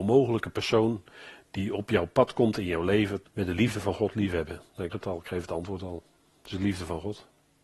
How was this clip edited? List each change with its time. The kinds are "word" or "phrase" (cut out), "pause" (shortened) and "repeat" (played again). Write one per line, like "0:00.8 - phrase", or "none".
0:03.3 - word
0:04.9 - word